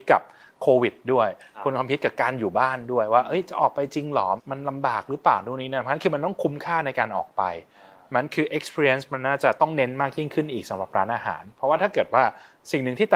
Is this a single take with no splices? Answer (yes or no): yes